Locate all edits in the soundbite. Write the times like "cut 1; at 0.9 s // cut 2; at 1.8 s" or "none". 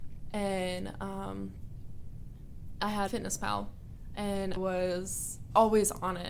cut 1; at 3.1 s // cut 2; at 4.6 s